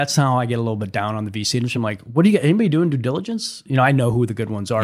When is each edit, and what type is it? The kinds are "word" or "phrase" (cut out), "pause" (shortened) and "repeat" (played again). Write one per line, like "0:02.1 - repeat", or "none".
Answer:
none